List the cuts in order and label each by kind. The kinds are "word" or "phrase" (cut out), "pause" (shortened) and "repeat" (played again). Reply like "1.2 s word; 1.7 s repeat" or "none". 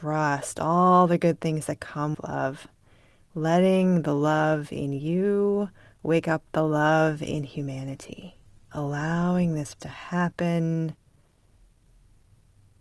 2.1 s word; 8.7 s word; 9.8 s word